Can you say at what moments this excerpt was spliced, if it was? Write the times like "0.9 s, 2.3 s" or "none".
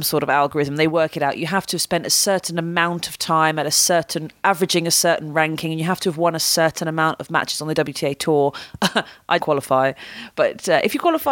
9.4 s